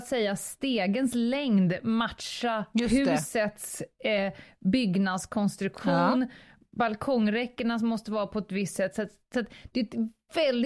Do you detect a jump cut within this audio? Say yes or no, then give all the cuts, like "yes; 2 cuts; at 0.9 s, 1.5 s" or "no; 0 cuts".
no; 0 cuts